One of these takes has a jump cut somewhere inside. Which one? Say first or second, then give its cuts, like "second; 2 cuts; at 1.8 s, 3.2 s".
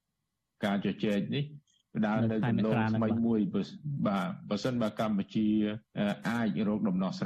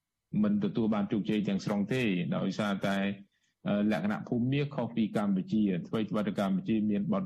first; 1 cut; at 5.9 s